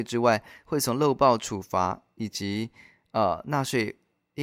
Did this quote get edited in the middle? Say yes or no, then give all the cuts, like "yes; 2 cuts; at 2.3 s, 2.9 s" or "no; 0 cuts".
no; 0 cuts